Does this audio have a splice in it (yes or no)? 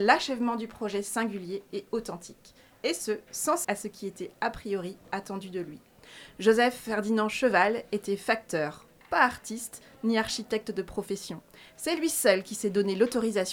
yes